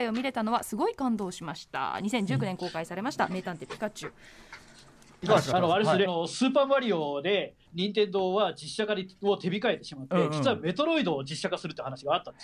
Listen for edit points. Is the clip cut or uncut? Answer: cut